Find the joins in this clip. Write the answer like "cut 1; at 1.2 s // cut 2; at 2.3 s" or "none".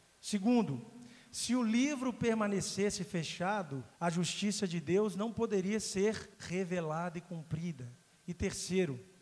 cut 1; at 3.9 s // cut 2; at 6.3 s

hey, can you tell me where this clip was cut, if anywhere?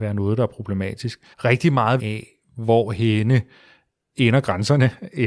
cut 1; at 1.3 s // cut 2; at 2.0 s

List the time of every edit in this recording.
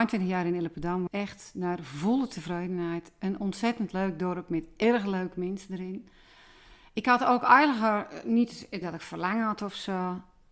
cut 1; at 1.1 s // cut 2; at 8.8 s

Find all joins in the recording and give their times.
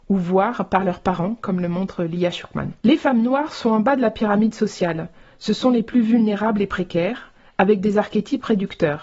cut 1; at 2.8 s

